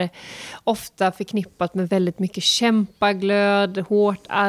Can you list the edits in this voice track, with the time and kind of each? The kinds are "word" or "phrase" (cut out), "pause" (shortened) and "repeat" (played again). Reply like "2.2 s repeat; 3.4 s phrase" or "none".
none